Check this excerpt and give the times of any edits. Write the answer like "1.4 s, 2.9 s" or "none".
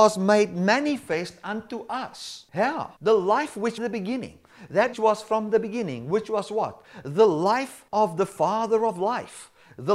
2.5 s, 3.0 s, 3.8 s, 4.9 s, 7.9 s